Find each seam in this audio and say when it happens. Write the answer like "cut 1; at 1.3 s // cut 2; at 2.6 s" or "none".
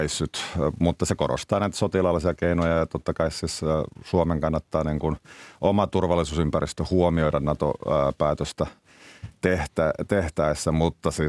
none